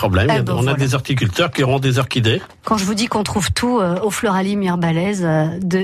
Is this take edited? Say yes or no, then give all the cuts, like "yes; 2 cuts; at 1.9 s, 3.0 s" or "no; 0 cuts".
no; 0 cuts